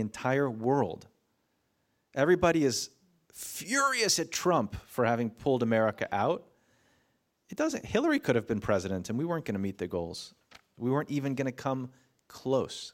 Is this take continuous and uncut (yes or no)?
yes